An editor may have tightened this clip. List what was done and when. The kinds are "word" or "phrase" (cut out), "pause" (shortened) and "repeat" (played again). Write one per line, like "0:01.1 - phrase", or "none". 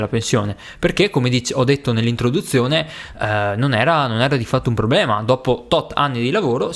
none